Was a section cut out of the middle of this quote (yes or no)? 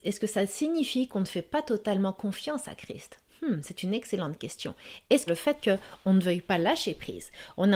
yes